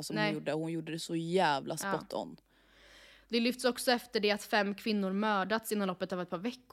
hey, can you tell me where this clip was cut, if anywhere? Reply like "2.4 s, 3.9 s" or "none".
none